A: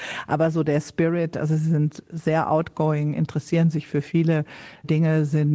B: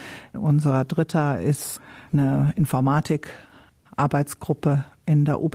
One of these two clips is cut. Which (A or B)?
B